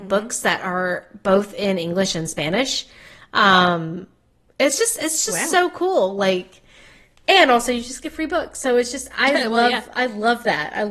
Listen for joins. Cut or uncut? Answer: uncut